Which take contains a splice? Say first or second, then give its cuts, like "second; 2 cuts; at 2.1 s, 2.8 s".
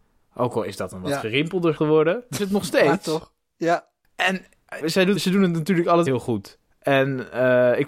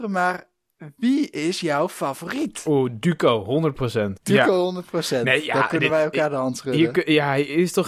first; 5 cuts; at 1.8 s, 2.4 s, 4.8 s, 5.1 s, 6.1 s